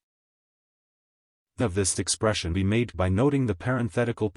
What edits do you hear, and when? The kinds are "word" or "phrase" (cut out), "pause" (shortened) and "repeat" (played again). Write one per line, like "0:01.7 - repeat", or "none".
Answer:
0:01.6 - word
0:01.9 - word
0:02.5 - word
0:02.9 - word